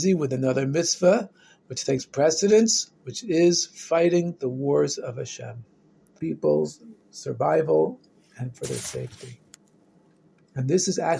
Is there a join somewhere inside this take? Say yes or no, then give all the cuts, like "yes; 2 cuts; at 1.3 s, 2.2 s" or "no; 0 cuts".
yes; 1 cut; at 6.2 s